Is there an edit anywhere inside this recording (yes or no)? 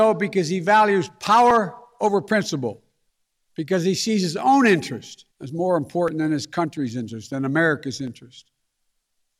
yes